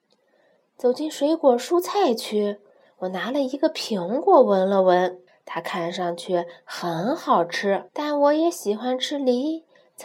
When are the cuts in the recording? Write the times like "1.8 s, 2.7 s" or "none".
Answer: 5.3 s, 7.9 s